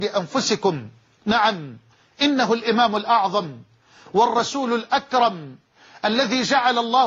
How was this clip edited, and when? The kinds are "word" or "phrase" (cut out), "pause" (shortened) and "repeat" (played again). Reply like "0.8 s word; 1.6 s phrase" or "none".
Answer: none